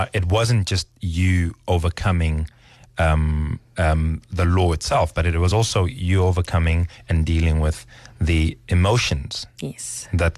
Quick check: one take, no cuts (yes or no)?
yes